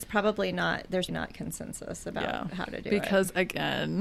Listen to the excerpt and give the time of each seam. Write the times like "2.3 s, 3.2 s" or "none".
1.1 s